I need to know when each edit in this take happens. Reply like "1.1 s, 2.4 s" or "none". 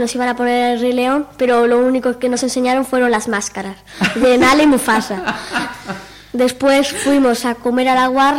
none